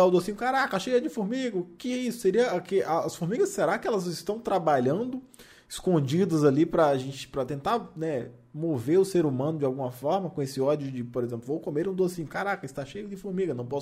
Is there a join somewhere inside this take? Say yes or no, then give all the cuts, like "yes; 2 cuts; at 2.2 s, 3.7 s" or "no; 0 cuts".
no; 0 cuts